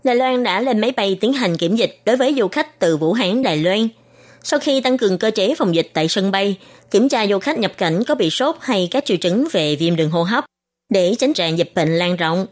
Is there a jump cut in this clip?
yes; 2 cuts; at 3.4 s, 11.3 s

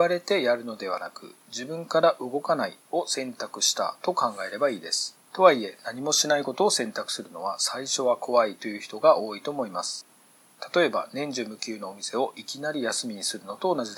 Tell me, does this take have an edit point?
yes; 1 cut; at 5.2 s

